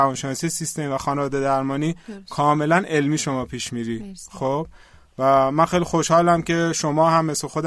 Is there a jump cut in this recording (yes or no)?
no